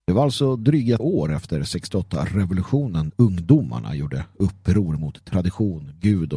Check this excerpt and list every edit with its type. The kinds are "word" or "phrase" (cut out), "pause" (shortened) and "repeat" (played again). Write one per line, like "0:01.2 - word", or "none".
0:01.0 - word
0:03.1 - word